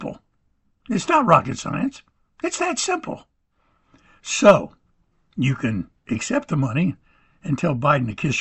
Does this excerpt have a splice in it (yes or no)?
no